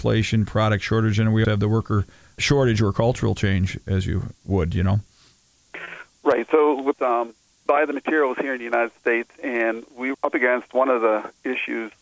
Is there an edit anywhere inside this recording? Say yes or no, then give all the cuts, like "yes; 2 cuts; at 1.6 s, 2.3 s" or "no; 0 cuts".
yes; 6 cuts; at 1.4 s, 2.4 s, 4.3 s, 6.9 s, 7.7 s, 10.1 s